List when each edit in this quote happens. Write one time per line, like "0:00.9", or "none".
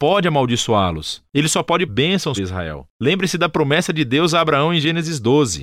0:01.9
0:02.4